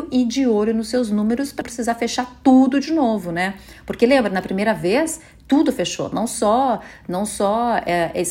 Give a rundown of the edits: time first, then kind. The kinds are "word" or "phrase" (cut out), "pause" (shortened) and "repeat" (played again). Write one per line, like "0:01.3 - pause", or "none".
0:01.6 - word